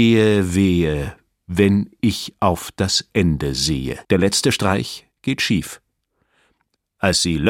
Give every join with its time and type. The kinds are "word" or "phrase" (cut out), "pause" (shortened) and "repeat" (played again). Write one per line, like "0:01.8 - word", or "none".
0:04.0 - pause
0:05.1 - pause